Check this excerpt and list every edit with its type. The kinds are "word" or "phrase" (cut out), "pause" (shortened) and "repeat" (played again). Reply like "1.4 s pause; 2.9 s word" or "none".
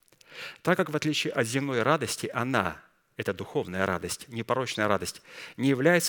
none